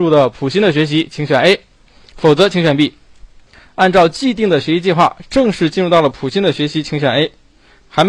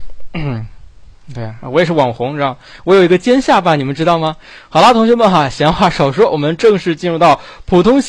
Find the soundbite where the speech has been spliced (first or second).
first